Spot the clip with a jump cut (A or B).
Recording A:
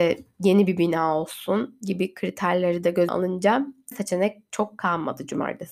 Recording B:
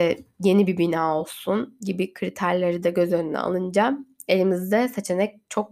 A